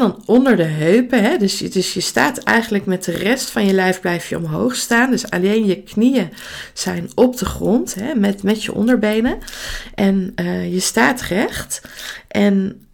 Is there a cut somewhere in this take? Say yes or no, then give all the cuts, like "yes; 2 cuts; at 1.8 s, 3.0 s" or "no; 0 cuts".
no; 0 cuts